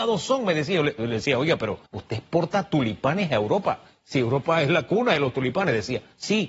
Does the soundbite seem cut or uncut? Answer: cut